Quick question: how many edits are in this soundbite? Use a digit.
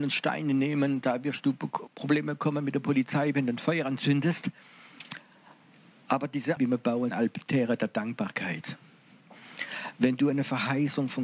3